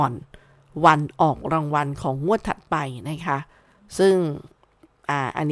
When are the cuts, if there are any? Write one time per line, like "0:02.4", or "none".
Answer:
none

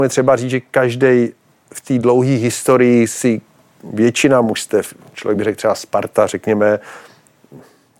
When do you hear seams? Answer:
none

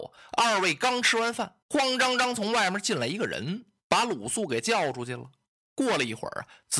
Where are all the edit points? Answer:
0:01.6

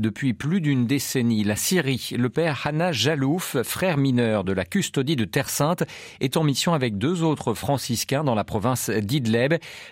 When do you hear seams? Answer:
none

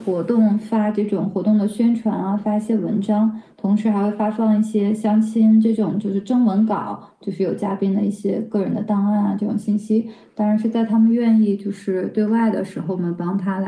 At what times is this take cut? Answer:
none

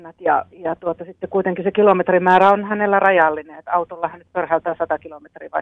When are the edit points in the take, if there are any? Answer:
none

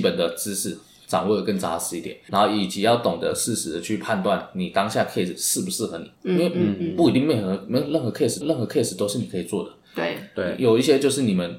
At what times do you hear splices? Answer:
0:02.3
0:06.2
0:08.4

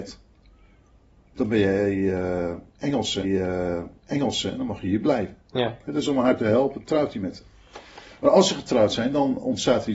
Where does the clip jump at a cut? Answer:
0:03.2
0:05.4

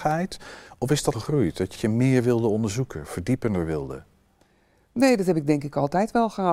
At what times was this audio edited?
0:01.1
0:01.8

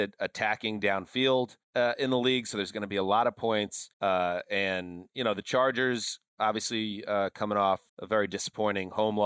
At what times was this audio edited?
0:01.6
0:03.9
0:06.3
0:07.9

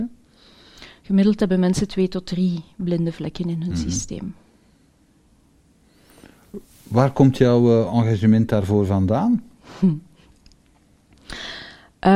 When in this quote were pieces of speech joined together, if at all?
0:06.6

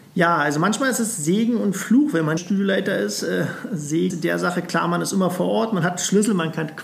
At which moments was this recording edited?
0:02.4
0:04.1

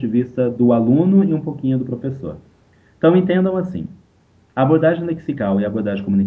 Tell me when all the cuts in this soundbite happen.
none

